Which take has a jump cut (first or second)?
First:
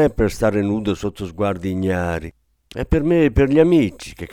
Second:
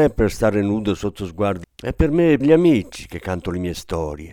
second